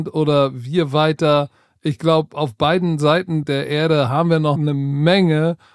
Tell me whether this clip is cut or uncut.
uncut